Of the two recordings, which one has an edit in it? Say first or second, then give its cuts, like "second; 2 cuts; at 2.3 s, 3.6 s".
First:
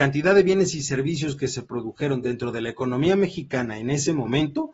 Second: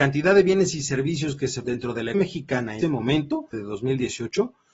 second; 4 cuts; at 1.6 s, 2.1 s, 2.8 s, 3.5 s